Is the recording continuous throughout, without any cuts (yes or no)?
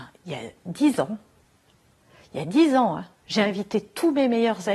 yes